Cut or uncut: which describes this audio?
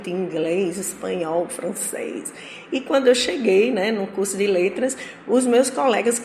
uncut